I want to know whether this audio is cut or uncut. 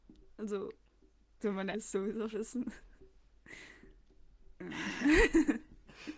cut